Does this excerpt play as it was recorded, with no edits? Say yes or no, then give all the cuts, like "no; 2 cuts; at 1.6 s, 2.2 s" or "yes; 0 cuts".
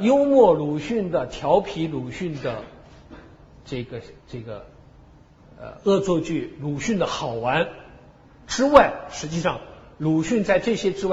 yes; 0 cuts